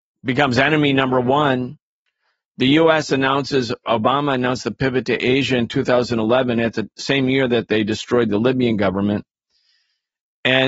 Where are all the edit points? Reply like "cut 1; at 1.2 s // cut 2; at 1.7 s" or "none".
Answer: none